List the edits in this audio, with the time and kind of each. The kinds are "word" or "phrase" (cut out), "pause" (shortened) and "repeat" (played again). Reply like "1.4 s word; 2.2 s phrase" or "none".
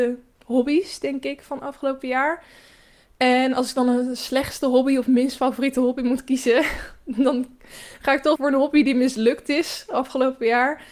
8.3 s phrase

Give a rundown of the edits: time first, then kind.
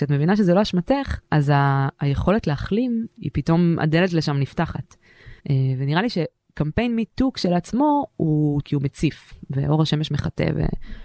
1.2 s pause; 3.2 s word; 5.4 s pause; 8.6 s word

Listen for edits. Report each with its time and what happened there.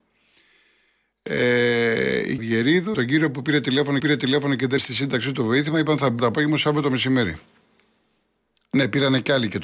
2.4 s word; 2.9 s word; 4.0 s repeat; 4.8 s word; 6.2 s phrase

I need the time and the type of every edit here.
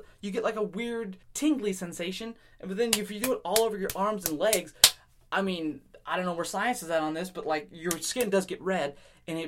1.2 s pause

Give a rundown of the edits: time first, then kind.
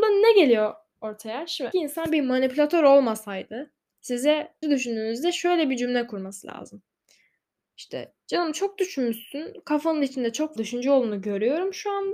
1.7 s phrase; 4.6 s word; 10.6 s word

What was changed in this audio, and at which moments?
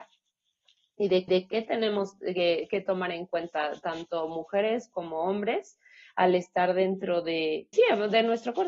1.3 s repeat; 7.7 s word

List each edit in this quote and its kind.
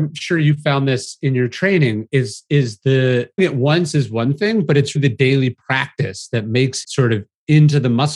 3.4 s word; 5.0 s word; 6.8 s word

